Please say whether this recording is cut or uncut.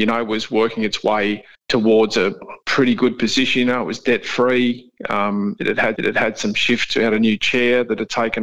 cut